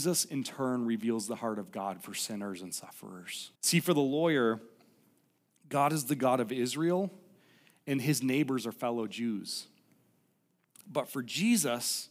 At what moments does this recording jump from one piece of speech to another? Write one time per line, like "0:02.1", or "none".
0:03.5